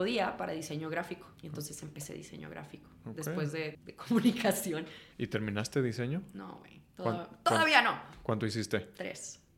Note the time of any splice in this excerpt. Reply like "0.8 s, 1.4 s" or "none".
1.4 s, 3.7 s, 5.1 s